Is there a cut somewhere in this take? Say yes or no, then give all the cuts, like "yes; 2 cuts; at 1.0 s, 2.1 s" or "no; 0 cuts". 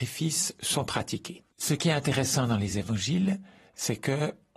no; 0 cuts